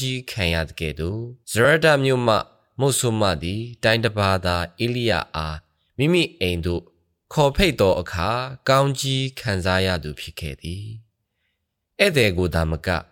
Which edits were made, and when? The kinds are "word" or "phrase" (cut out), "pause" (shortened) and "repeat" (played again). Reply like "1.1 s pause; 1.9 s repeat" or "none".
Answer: 1.4 s pause